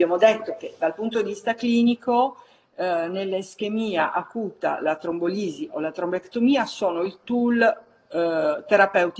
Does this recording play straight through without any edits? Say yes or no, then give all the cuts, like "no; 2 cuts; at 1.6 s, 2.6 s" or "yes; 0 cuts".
yes; 0 cuts